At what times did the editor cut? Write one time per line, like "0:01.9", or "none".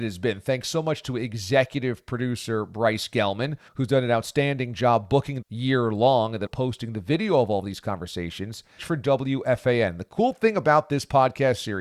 0:03.7
0:05.4
0:06.5
0:08.8